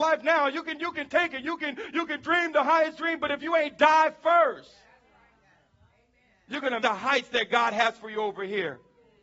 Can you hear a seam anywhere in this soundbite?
yes; 1 cut; at 6.8 s

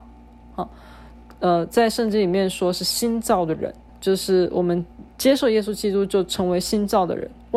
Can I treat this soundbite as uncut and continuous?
no; 2 cuts; at 3.9 s, 5.1 s

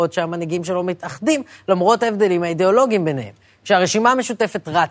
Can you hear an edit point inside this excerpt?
no; 0 cuts

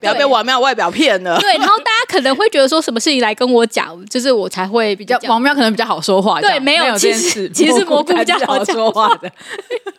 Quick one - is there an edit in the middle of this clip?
no; 0 cuts

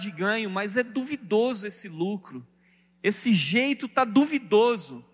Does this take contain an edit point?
no; 0 cuts

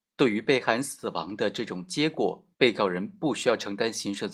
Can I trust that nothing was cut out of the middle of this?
no; 1 cut; at 2.5 s

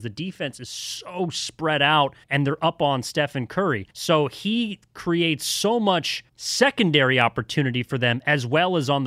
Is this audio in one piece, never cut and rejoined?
no; 3 cuts; at 2.2 s, 3.9 s, 6.3 s

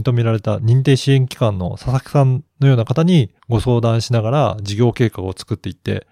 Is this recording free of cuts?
no; 2 cuts; at 2.5 s, 3.4 s

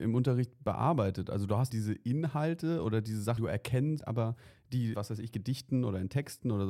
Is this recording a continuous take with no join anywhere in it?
no; 4 cuts; at 1.7 s, 3.4 s, 4.0 s, 4.9 s

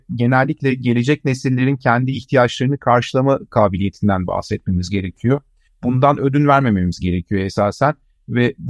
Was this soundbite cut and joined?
no; 0 cuts

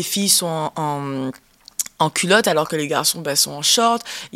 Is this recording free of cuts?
yes; 0 cuts

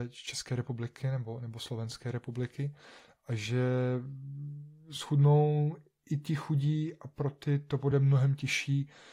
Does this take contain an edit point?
no; 0 cuts

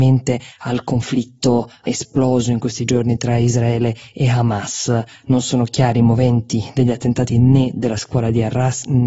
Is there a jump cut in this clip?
no; 0 cuts

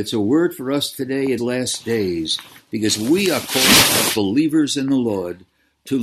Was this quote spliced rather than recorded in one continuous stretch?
yes; 1 cut; at 1.4 s

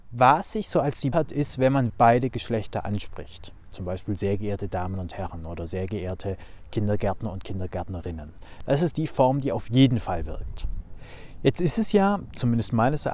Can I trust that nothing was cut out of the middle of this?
no; 2 cuts; at 1.1 s, 1.9 s

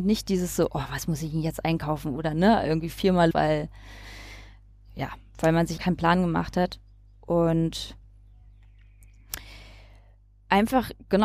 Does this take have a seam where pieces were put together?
yes; 2 cuts; at 3.3 s, 5.8 s

